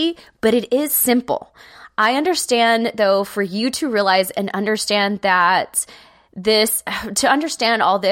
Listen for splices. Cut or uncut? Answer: uncut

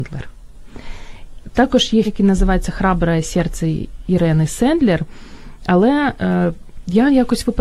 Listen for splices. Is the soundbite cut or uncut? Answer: cut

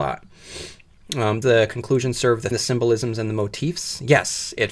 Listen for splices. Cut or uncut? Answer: cut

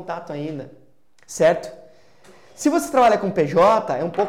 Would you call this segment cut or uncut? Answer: uncut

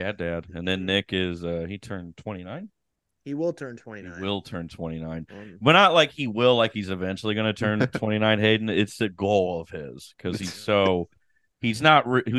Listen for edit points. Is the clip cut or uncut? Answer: uncut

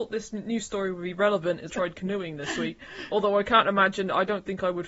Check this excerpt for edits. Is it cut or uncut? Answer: cut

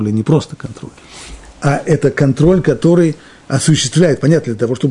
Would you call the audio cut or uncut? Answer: uncut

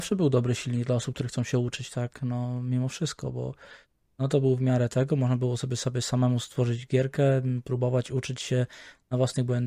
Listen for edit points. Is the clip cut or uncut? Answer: uncut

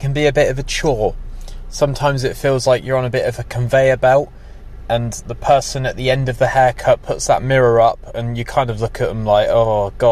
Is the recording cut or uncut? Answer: uncut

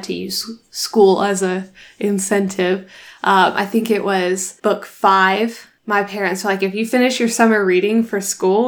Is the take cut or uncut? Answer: uncut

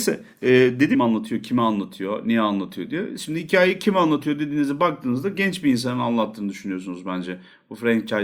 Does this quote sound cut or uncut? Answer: cut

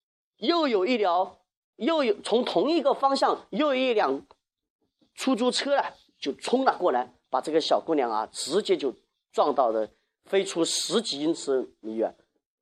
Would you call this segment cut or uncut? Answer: uncut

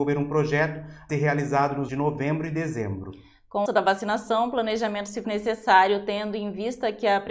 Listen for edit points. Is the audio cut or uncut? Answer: cut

